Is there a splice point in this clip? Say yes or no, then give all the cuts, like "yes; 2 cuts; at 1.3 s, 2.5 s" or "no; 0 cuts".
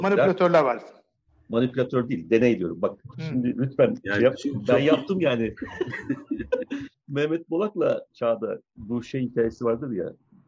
yes; 2 cuts; at 3.1 s, 8.1 s